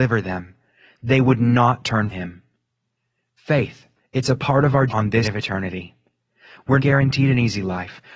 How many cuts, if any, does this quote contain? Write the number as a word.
five